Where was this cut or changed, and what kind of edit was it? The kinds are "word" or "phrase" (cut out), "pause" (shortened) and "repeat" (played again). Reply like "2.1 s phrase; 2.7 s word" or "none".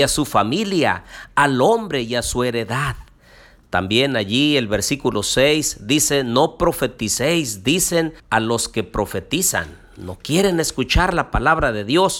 8.2 s pause